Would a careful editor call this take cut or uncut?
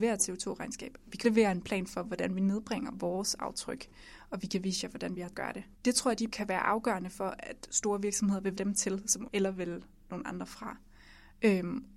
cut